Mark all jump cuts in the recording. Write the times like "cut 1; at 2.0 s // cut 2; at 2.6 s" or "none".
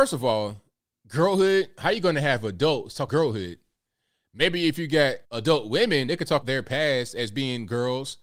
cut 1; at 3.1 s // cut 2; at 5.2 s // cut 3; at 6.4 s